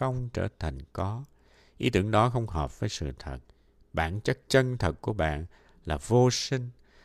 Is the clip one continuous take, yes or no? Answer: yes